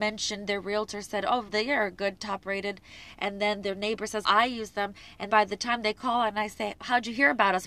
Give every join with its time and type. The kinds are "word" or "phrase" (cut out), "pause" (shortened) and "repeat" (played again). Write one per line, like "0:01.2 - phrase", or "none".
0:01.5 - word
0:04.2 - word
0:05.3 - word